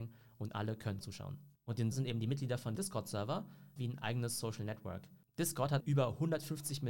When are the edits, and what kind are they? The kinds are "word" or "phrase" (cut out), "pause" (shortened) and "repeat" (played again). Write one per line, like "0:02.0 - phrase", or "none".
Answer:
0:01.0 - word
0:01.9 - word
0:02.8 - word
0:03.8 - word
0:05.8 - word